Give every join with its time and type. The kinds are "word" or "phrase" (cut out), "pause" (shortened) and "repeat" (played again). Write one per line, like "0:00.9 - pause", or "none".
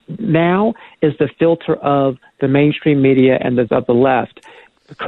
0:03.7 - word